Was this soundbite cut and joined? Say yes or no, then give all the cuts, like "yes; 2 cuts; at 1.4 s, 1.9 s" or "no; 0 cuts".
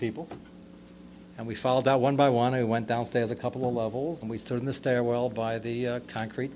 yes; 1 cut; at 4.2 s